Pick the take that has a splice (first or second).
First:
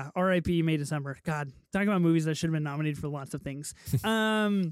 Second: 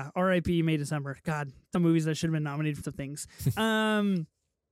second